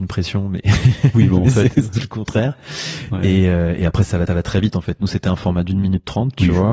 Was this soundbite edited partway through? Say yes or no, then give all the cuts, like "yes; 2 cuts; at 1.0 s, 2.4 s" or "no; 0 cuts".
yes; 1 cut; at 4.3 s